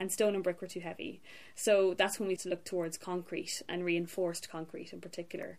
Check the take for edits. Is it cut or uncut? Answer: cut